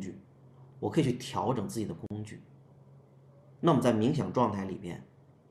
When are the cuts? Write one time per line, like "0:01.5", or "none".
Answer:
none